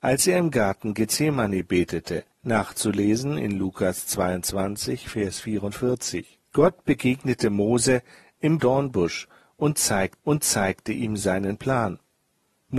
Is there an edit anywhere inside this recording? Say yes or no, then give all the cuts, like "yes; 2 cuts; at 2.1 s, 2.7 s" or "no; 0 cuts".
yes; 4 cuts; at 2.3 s, 6.4 s, 8.6 s, 10.2 s